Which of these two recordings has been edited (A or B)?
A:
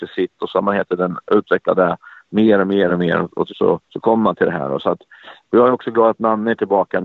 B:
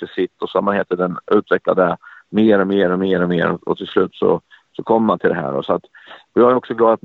A